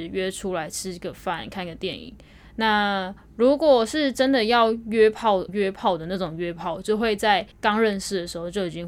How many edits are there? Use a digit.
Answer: 2